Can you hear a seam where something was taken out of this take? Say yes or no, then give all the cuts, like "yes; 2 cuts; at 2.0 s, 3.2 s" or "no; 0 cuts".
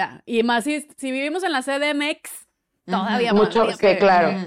no; 0 cuts